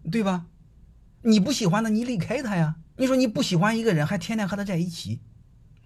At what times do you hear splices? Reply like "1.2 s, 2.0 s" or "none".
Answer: 2.9 s